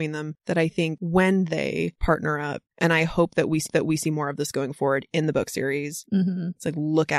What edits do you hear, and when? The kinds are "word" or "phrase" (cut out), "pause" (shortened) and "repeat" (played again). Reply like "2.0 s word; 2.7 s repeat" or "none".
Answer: 3.7 s repeat

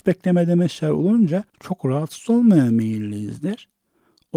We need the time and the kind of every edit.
1.5 s pause

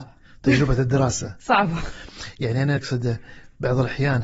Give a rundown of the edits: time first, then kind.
2.8 s word

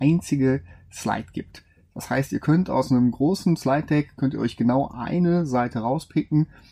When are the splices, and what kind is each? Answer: none

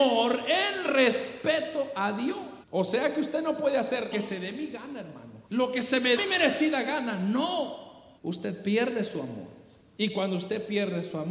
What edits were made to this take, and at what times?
2.6 s pause; 4.1 s word; 5.5 s pause; 6.2 s word; 8.2 s pause

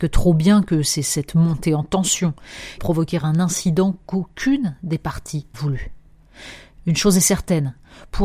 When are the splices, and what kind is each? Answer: 2.8 s phrase; 5.5 s word

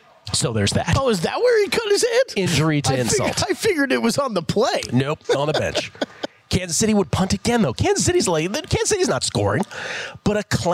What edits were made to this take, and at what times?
5.2 s pause

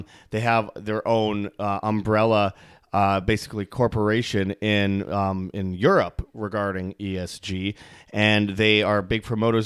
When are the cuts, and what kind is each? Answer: none

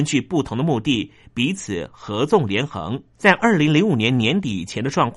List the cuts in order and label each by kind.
3.1 s pause

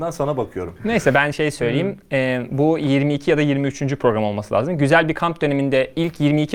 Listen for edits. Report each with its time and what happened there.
none

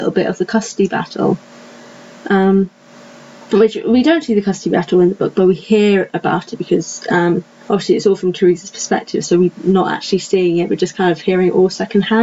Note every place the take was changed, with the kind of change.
none

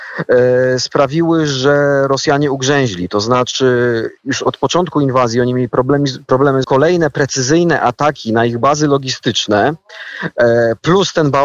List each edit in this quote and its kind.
6.6 s phrase

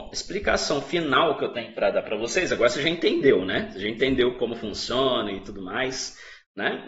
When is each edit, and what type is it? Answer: none

